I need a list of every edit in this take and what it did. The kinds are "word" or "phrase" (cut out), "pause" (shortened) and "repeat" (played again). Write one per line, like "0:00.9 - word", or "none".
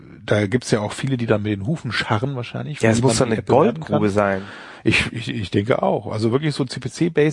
none